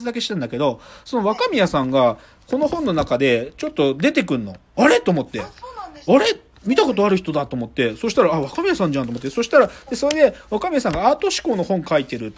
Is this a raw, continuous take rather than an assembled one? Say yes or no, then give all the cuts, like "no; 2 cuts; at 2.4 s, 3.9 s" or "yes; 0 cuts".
yes; 0 cuts